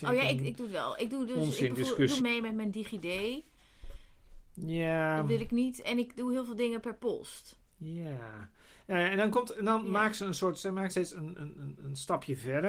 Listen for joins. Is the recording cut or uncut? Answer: cut